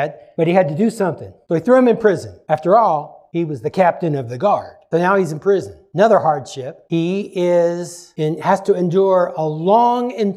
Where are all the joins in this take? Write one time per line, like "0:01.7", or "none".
none